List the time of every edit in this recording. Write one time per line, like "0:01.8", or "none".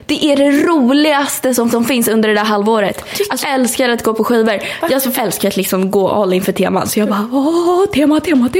0:01.7
0:03.4
0:05.2